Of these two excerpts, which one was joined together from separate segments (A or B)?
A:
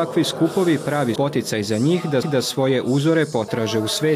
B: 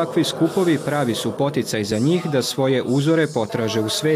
A